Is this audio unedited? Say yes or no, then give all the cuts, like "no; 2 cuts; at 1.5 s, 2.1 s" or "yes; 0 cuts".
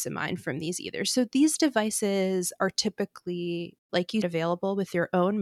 no; 2 cuts; at 3.8 s, 4.2 s